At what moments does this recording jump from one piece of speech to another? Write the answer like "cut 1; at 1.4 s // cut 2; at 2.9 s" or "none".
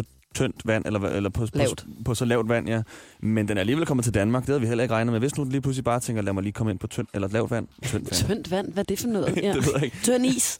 cut 1; at 7.1 s